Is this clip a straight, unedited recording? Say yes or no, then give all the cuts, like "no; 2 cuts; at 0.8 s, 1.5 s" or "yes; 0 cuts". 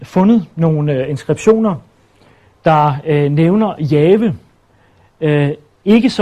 yes; 0 cuts